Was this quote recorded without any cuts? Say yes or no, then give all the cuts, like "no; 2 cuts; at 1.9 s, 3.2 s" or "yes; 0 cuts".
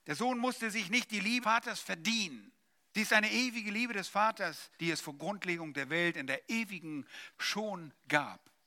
no; 4 cuts; at 1.4 s, 2.8 s, 4.8 s, 7.3 s